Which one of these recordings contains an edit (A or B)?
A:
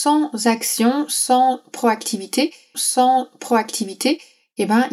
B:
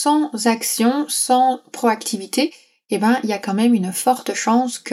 A